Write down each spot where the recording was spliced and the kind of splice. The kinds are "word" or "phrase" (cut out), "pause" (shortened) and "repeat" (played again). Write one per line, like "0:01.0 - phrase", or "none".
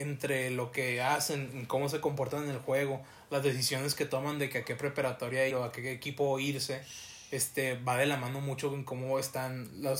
0:05.5 - word